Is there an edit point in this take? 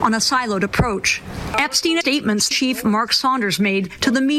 yes; 2 cuts; at 2.0 s, 2.5 s

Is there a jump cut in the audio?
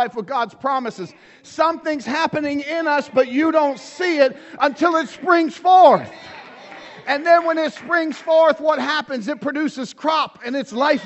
no; 0 cuts

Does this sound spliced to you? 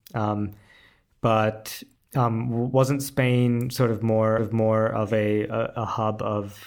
yes; 1 cut; at 4.4 s

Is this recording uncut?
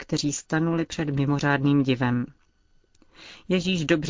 yes; 0 cuts

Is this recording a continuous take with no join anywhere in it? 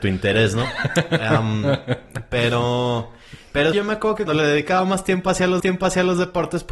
no; 3 cuts; at 3.7 s, 4.3 s, 5.6 s

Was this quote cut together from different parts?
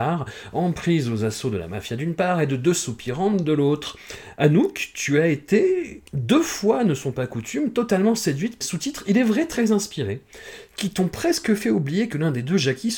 yes; 2 cuts; at 6.1 s, 8.6 s

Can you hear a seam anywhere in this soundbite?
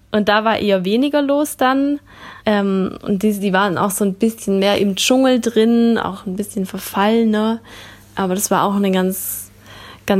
yes; 1 cut; at 2.4 s

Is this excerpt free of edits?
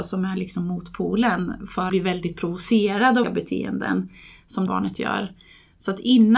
no; 3 cuts; at 1.9 s, 3.2 s, 4.7 s

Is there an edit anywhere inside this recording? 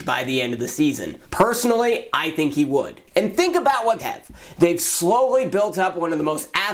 yes; 3 cuts; at 1.3 s, 3.1 s, 4.0 s

